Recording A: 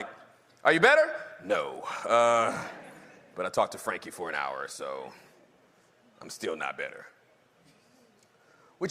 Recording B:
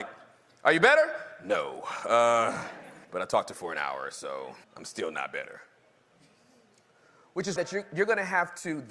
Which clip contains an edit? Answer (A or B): B